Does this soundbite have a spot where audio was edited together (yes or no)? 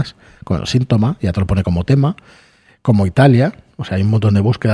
no